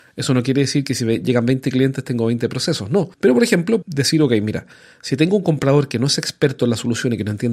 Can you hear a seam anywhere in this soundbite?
yes; 2 cuts; at 3.1 s, 3.8 s

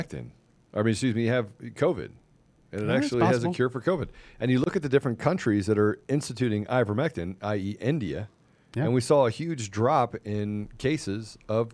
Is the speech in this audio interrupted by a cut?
no; 0 cuts

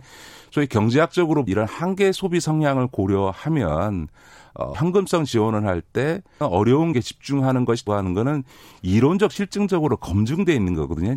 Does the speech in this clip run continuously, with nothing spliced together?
no; 5 cuts; at 1.5 s, 4.7 s, 6.4 s, 6.9 s, 7.9 s

